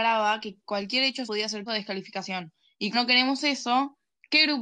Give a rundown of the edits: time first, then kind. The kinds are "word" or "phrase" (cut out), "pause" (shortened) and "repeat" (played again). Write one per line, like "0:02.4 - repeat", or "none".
0:01.3 - word
0:01.7 - word
0:02.9 - word